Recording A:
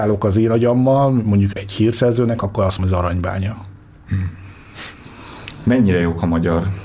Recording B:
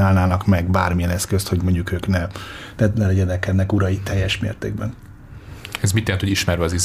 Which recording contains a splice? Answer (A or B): A